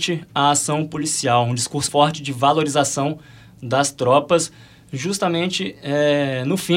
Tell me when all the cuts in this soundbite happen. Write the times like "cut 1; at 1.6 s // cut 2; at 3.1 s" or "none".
cut 1; at 1.9 s